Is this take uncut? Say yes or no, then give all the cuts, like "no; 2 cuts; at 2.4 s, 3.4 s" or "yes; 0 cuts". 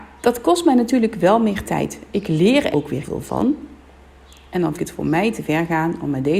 no; 3 cuts; at 2.7 s, 3.0 s, 4.7 s